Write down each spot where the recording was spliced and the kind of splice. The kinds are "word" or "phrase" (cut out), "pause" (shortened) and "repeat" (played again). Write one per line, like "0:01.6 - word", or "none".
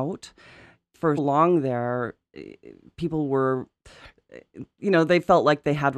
0:01.2 - word